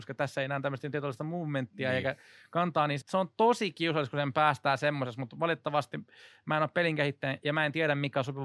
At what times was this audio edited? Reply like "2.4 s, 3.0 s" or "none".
3.0 s